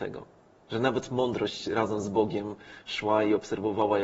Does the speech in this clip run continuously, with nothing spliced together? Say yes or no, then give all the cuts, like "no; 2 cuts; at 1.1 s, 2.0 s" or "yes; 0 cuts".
yes; 0 cuts